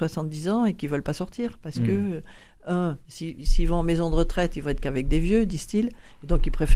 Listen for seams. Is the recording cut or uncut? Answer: uncut